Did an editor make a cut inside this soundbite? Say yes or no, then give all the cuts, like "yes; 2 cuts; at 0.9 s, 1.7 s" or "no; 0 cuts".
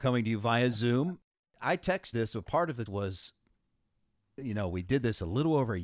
yes; 2 cuts; at 2.1 s, 2.9 s